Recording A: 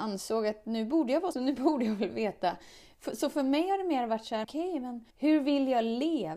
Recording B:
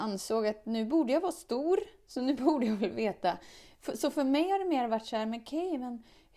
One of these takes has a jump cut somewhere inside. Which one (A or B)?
A